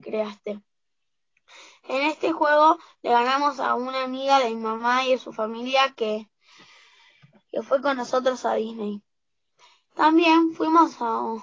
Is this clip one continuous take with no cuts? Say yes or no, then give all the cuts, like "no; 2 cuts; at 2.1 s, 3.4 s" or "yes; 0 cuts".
yes; 0 cuts